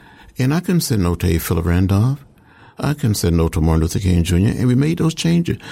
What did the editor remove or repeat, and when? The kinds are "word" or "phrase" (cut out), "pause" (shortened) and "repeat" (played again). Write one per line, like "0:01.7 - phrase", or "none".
none